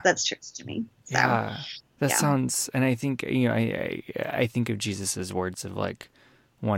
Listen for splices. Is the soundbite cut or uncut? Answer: cut